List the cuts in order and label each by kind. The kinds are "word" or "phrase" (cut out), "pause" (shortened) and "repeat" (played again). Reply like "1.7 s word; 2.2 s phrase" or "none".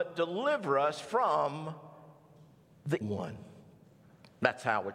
3.0 s word

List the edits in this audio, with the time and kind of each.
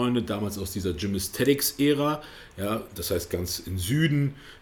none

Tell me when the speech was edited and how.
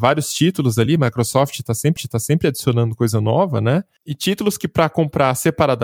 2.0 s repeat

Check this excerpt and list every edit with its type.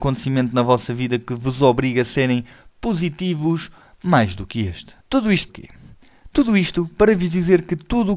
5.0 s pause; 5.5 s phrase

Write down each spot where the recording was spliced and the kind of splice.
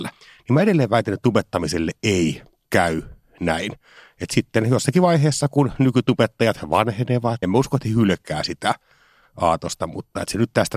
7.4 s word

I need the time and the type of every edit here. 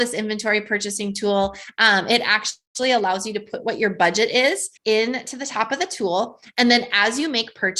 4.8 s pause

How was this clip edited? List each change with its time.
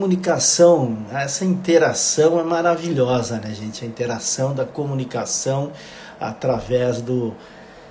none

